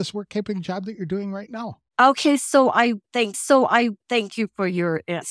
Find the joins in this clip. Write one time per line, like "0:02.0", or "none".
0:01.9
0:03.3